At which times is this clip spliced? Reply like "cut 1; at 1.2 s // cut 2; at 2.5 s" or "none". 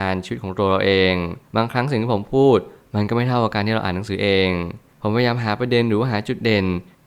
cut 1; at 1.4 s